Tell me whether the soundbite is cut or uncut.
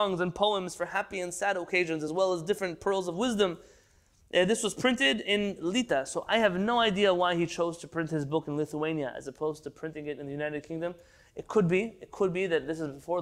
uncut